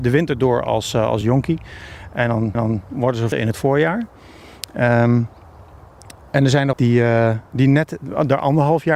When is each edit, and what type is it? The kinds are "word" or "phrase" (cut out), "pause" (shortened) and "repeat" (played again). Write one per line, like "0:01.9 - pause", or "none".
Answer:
0:01.2 - phrase
0:02.5 - repeat
0:03.3 - word
0:06.7 - phrase
0:07.5 - pause